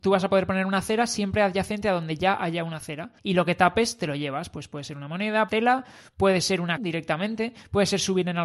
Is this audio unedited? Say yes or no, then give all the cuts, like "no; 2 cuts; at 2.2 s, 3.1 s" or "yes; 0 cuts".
no; 3 cuts; at 3.2 s, 5.5 s, 6.8 s